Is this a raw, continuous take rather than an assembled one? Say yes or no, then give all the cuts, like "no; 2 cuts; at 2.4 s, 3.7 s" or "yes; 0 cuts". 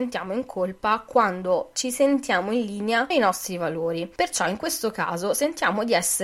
no; 2 cuts; at 1.7 s, 3.1 s